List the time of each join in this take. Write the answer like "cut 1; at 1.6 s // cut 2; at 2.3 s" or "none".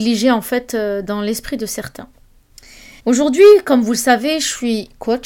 cut 1; at 3.0 s